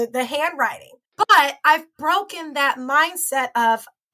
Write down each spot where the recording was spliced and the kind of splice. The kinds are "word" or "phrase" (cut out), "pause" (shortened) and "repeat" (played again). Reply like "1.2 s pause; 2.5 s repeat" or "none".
1.1 s pause